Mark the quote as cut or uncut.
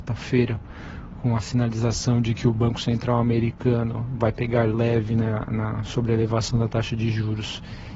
uncut